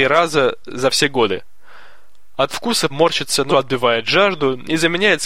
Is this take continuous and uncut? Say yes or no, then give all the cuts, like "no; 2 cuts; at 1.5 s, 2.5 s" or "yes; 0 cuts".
no; 2 cuts; at 2.9 s, 3.5 s